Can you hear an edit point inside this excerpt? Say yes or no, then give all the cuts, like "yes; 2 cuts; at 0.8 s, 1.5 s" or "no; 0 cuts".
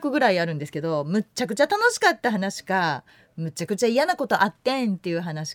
no; 0 cuts